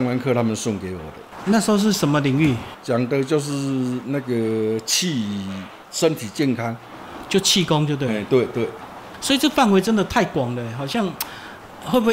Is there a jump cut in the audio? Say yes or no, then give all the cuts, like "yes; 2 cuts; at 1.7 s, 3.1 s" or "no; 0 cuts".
no; 0 cuts